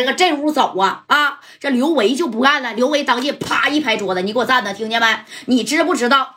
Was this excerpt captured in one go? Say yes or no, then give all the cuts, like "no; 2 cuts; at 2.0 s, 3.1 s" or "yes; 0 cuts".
yes; 0 cuts